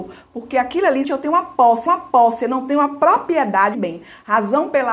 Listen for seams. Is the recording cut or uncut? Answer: cut